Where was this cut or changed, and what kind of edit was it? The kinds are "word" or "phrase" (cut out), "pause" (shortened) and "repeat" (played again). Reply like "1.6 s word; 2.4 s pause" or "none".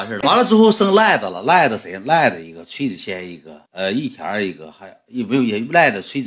3.7 s pause